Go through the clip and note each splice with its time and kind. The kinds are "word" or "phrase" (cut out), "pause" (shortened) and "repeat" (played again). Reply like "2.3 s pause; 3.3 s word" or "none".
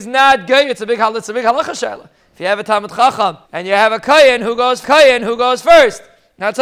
3.4 s pause; 4.8 s repeat